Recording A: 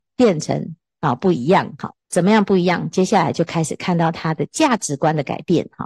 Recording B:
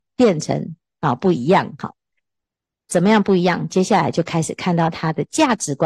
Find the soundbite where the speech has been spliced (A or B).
A